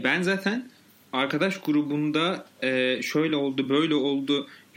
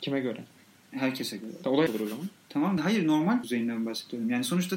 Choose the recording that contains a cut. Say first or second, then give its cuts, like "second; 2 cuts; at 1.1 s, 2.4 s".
second; 3 cuts; at 1.9 s, 2.8 s, 3.4 s